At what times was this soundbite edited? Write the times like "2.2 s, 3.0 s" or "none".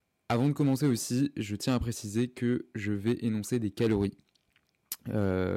none